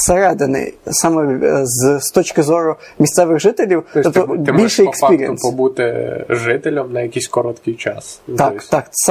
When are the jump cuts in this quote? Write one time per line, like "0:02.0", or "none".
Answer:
none